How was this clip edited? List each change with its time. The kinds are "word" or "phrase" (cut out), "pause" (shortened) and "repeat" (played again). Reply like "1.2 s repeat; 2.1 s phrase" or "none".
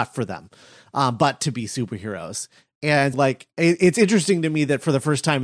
3.1 s word